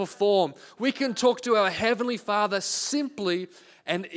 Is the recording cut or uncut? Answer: uncut